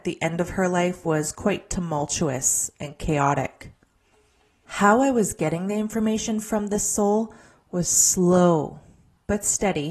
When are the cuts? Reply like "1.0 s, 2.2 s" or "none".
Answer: none